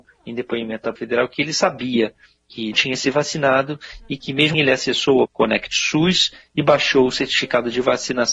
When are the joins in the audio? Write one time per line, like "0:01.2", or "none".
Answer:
0:01.0
0:02.7
0:04.5
0:05.2

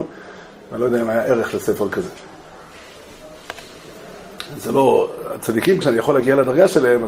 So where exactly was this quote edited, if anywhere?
0:05.8

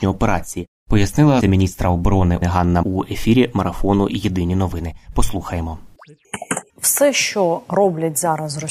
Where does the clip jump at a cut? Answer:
0:01.4
0:02.4
0:02.8
0:06.7

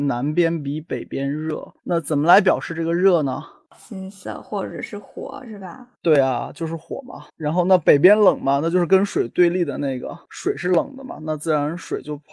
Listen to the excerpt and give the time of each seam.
0:01.8
0:05.9
0:07.3

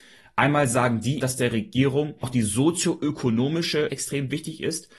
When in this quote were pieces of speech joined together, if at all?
0:01.2
0:02.2
0:03.9

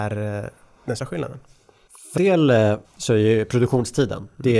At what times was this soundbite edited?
0:01.0
0:02.2
0:02.8

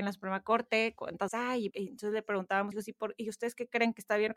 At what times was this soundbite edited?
0:01.3
0:01.7
0:02.7

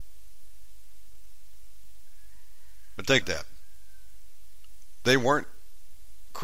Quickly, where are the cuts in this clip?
0:03.2

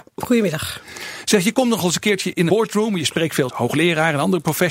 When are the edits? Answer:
0:02.5
0:03.5

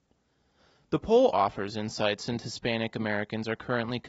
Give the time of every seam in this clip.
0:01.3
0:02.4

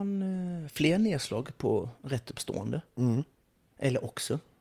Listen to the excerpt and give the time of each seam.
none

